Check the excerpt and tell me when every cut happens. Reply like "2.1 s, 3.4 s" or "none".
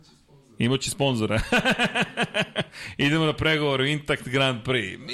0.9 s